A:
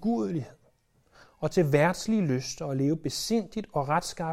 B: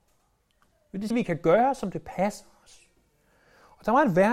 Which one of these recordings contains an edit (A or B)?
B